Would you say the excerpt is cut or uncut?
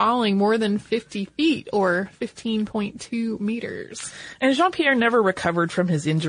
uncut